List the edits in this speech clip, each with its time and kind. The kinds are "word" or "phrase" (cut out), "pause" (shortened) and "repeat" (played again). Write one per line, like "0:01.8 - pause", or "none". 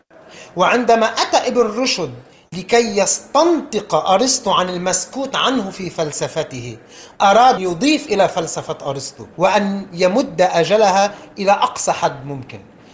0:07.6 - word
0:09.3 - pause